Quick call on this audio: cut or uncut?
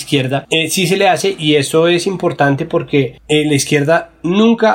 uncut